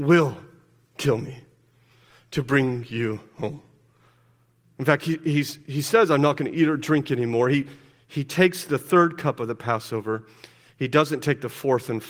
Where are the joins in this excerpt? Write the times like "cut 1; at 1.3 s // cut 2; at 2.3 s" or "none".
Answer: none